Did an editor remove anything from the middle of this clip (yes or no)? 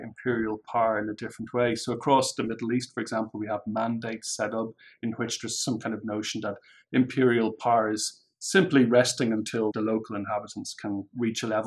no